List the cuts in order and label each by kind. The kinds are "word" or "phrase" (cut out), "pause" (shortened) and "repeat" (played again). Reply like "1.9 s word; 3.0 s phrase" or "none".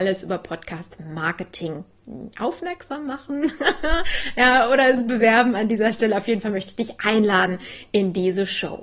none